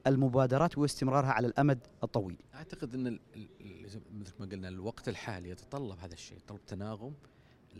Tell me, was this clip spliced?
yes; 1 cut; at 2.4 s

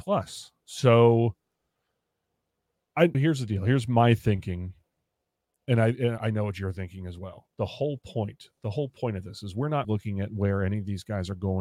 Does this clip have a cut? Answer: yes; 3 cuts; at 3.1 s, 6.2 s, 9.8 s

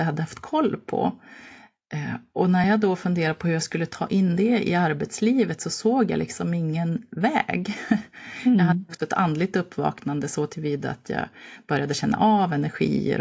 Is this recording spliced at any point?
no; 0 cuts

